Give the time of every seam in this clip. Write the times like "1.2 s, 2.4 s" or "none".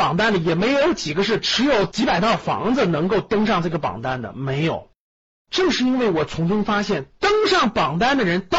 none